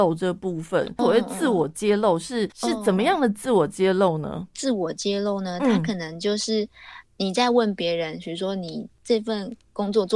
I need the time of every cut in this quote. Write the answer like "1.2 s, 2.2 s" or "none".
2.5 s, 7.1 s